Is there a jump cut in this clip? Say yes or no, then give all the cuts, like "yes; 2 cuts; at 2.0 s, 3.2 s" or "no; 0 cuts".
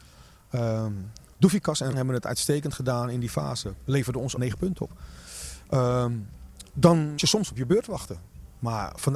yes; 3 cuts; at 1.9 s, 4.4 s, 7.2 s